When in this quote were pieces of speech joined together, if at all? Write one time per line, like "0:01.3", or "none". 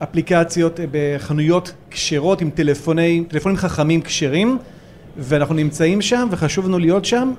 none